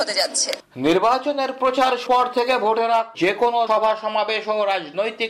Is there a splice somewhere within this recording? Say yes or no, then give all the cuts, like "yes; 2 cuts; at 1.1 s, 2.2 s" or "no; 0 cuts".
yes; 3 cuts; at 2.1 s, 3.1 s, 3.7 s